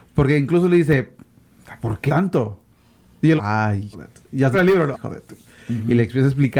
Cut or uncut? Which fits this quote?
cut